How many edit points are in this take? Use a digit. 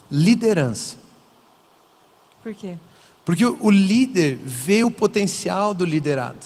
0